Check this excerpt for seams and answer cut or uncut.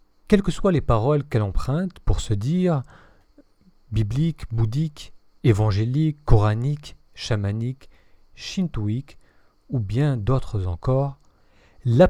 uncut